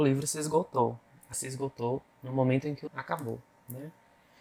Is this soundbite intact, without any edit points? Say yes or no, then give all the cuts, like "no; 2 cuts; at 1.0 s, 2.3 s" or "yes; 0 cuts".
no; 3 cuts; at 1.3 s, 2.1 s, 2.9 s